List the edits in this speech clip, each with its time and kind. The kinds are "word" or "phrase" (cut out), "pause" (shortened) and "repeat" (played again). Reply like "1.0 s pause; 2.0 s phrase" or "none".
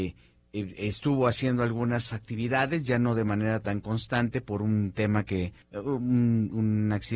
5.6 s pause